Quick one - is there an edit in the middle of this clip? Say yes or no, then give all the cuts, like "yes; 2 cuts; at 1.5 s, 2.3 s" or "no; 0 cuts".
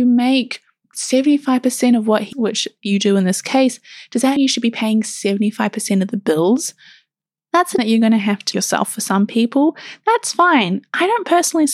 yes; 4 cuts; at 2.3 s, 4.4 s, 7.8 s, 8.5 s